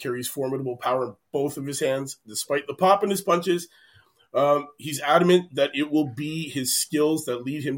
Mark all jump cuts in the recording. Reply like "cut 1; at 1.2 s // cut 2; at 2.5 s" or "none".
none